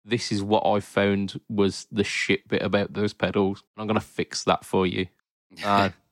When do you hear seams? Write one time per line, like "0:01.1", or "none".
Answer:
0:03.7
0:05.2